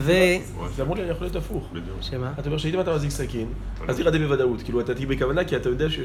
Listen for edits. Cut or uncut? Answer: cut